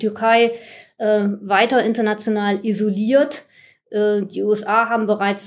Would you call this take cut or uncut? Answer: uncut